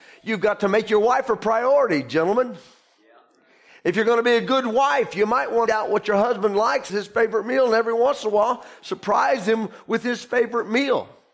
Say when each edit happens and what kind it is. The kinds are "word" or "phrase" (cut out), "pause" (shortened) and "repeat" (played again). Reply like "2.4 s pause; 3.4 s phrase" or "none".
5.7 s phrase; 6.9 s word